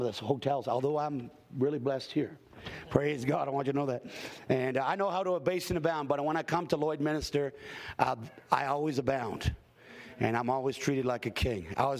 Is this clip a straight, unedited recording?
yes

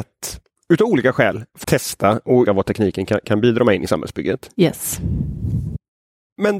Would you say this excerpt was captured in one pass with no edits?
no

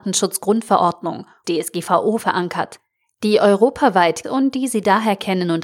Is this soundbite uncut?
no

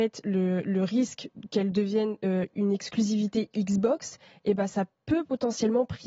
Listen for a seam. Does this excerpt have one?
no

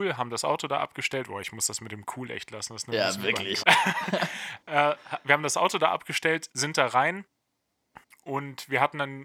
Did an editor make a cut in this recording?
yes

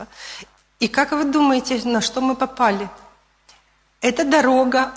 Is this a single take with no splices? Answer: yes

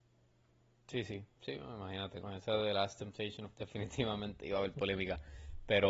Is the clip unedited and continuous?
no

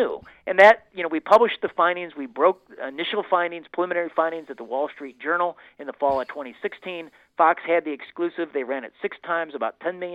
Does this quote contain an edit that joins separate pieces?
no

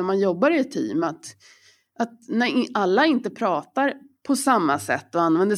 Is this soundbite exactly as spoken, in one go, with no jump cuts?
yes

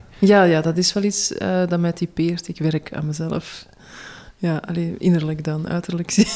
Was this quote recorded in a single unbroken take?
yes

